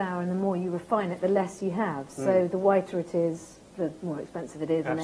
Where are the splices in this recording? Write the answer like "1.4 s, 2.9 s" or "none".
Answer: 3.7 s